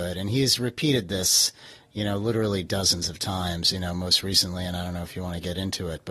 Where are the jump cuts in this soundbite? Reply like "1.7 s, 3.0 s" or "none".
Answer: none